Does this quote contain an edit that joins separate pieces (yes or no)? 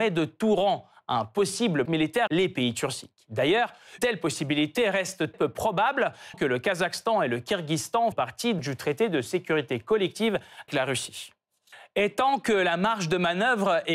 yes